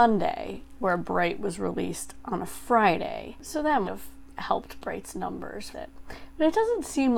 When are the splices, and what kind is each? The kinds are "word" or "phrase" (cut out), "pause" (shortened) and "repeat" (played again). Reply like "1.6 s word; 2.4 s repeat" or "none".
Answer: 3.8 s word; 5.7 s word